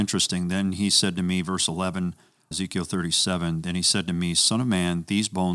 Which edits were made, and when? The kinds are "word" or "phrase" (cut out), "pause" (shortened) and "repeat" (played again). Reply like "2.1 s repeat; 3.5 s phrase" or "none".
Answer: 2.5 s word